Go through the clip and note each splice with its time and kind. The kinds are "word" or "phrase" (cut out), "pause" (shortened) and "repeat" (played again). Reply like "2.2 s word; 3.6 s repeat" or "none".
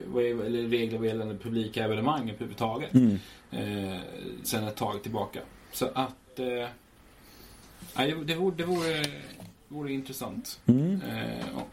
4.4 s word